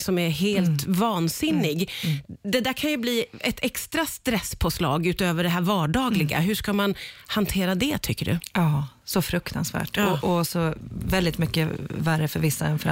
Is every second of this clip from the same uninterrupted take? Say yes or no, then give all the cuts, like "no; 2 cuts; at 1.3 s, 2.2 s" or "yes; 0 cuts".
yes; 0 cuts